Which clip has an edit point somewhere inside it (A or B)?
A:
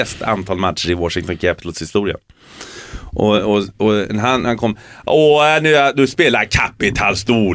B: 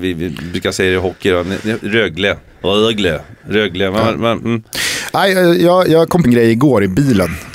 B